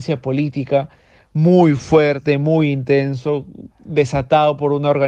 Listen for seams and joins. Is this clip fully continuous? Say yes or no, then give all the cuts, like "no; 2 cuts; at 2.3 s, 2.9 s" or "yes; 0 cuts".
yes; 0 cuts